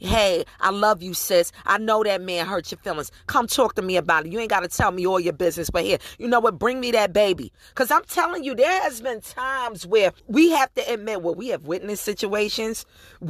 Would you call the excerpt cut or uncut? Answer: cut